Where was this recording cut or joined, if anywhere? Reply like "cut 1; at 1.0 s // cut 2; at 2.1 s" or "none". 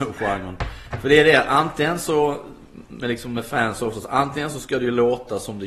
none